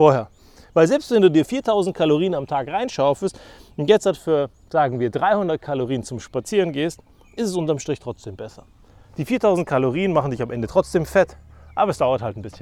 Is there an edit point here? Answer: no; 0 cuts

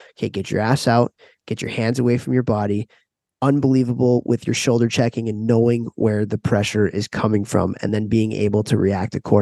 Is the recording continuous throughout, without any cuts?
yes; 0 cuts

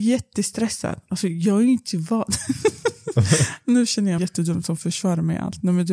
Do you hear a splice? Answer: yes; 1 cut; at 4.2 s

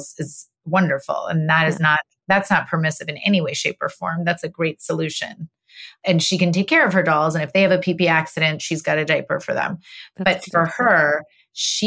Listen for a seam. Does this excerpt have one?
no; 0 cuts

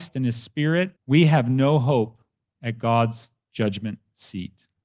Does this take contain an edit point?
yes; 1 cut; at 1.0 s

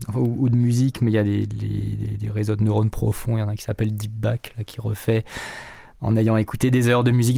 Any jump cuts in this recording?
no; 0 cuts

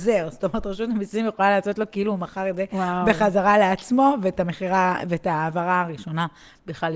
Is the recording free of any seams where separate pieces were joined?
yes; 0 cuts

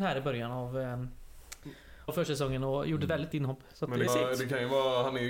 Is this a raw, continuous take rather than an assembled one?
no; 3 cuts; at 2.1 s, 3.3 s, 4.1 s

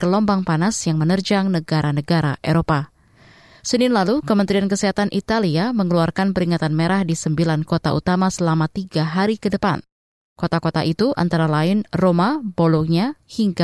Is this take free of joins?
yes; 0 cuts

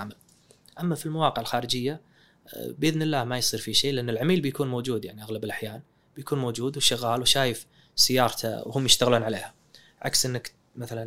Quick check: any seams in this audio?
no; 0 cuts

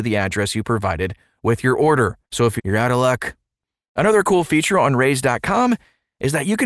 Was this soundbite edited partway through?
yes; 2 cuts; at 2.2 s, 2.6 s

